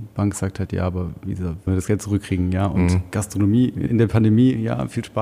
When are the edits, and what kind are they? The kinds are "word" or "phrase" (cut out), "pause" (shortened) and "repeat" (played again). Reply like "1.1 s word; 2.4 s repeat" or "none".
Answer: 1.7 s word; 3.9 s word